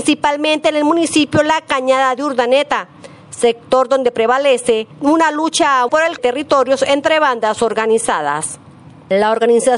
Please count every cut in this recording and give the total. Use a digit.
3